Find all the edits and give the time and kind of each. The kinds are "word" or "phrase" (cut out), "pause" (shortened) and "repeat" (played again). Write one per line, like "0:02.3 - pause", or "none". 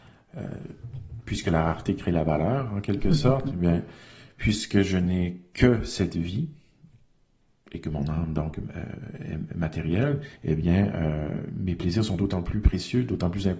none